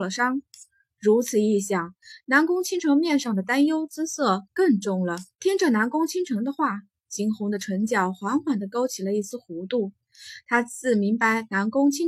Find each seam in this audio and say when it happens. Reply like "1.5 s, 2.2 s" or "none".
4.4 s, 5.3 s